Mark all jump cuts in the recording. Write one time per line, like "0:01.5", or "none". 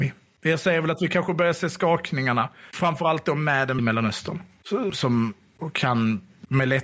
0:03.8
0:04.9